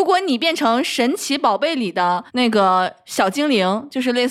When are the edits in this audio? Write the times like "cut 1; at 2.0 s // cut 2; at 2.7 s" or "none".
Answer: cut 1; at 2.3 s